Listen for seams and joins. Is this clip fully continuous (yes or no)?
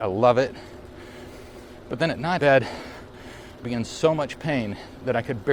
no